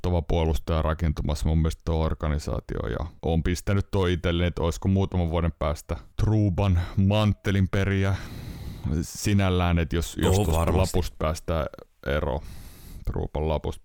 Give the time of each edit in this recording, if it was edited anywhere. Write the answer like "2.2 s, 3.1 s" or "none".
3.2 s, 6.1 s